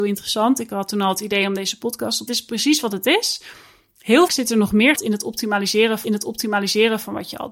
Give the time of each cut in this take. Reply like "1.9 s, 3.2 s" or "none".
2.3 s, 4.3 s, 5.0 s, 6.0 s